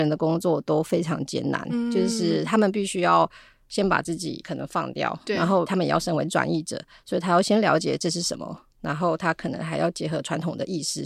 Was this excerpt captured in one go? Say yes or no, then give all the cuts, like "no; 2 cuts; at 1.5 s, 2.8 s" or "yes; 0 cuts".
yes; 0 cuts